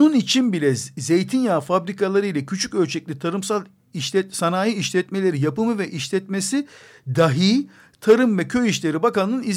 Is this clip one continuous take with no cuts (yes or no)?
yes